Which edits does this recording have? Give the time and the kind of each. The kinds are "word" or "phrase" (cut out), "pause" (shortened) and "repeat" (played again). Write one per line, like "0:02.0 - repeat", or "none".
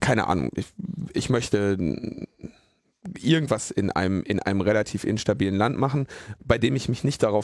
none